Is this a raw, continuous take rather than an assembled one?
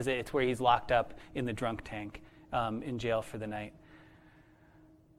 yes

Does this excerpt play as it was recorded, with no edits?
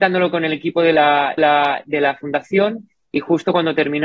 no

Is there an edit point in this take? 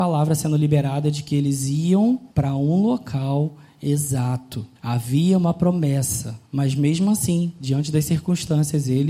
yes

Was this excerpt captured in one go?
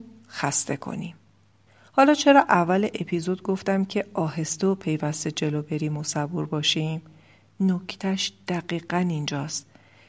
yes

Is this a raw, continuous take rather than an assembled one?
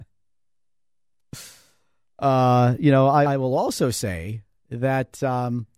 no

